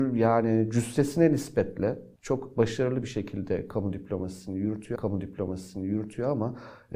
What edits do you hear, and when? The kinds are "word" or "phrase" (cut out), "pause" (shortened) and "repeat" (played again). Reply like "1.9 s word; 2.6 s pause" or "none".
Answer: 2.2 s pause; 5.0 s repeat